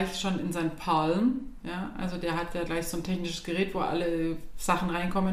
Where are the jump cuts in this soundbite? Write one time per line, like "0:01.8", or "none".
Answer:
0:02.7